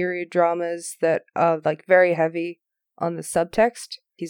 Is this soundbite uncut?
yes; 0 cuts

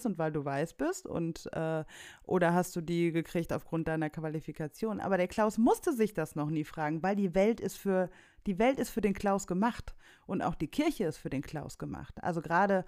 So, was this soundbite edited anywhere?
no; 0 cuts

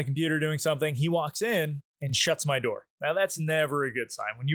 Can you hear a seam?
no; 0 cuts

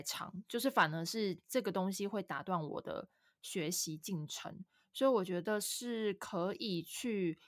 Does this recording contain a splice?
no; 0 cuts

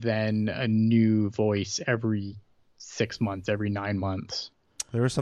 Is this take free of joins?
yes; 0 cuts

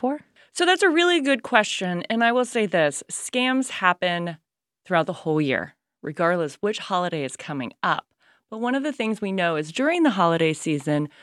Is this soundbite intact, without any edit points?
yes; 0 cuts

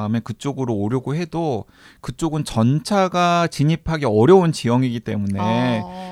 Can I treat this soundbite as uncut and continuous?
yes; 0 cuts

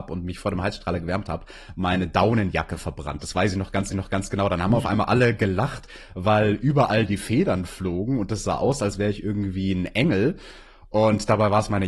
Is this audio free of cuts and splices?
no; 1 cut; at 3.9 s

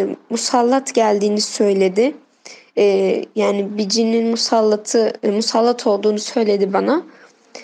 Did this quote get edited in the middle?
no; 0 cuts

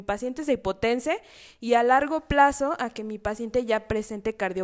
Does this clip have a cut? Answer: no; 0 cuts

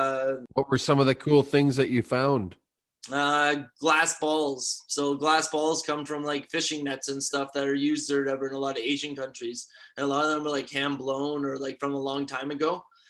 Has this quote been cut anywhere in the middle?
no; 0 cuts

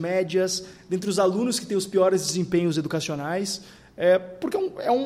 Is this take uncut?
yes; 0 cuts

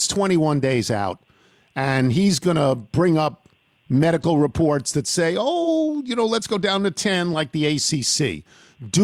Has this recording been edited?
no; 0 cuts

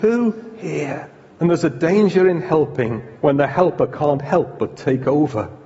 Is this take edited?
yes; 2 cuts; at 1.3 s, 3.2 s

